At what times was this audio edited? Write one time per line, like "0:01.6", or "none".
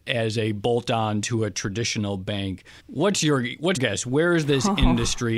0:02.8
0:03.8